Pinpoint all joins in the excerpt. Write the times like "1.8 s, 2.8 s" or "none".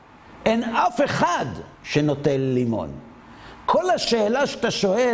1.7 s